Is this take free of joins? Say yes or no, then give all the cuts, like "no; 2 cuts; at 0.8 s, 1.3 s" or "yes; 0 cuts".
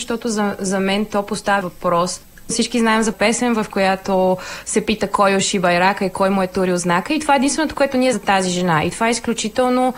no; 3 cuts; at 1.6 s, 3.1 s, 8.1 s